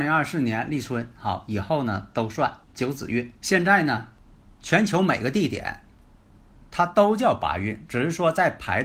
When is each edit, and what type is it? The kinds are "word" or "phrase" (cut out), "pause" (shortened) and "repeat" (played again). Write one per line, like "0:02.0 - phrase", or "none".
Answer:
0:02.6 - pause
0:03.4 - pause

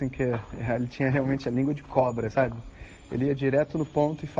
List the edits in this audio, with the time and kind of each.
0:02.3 - word

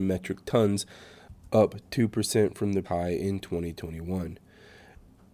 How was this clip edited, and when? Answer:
0:02.8 - word

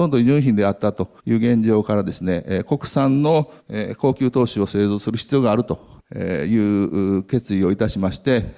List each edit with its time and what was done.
0:01.2 - pause
0:03.6 - pause

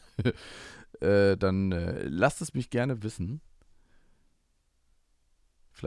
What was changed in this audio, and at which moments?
none

